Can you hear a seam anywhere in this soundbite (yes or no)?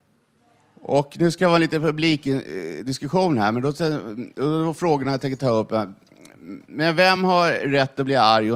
no